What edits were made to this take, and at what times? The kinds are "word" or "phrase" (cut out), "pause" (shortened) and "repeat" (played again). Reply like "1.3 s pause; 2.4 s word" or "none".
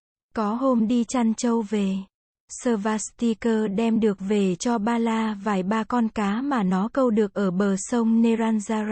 none